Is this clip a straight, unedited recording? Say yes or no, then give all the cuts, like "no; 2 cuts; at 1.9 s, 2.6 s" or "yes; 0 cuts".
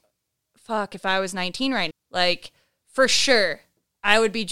no; 1 cut; at 1.9 s